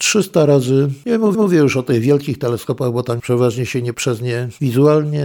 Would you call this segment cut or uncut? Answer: cut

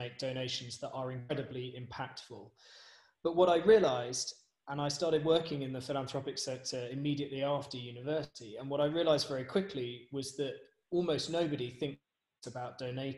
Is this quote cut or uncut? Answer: uncut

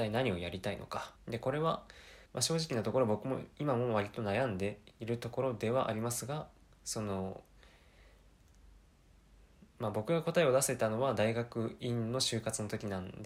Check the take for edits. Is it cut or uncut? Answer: cut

